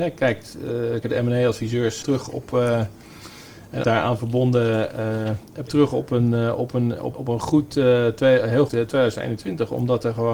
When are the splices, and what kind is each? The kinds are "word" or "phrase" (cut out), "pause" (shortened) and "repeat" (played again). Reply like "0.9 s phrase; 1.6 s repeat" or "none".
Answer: 1.0 s word; 2.0 s word; 3.8 s word; 5.7 s word; 7.1 s word; 8.7 s word